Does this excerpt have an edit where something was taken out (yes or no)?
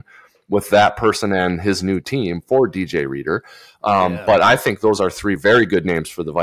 no